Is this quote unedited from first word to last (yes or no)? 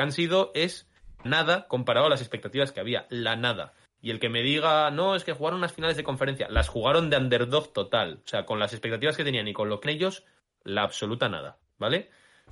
no